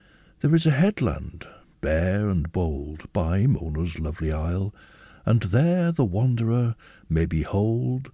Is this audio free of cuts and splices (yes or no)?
yes